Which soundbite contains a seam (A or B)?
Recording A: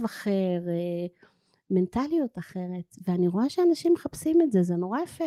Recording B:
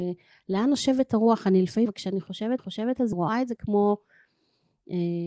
B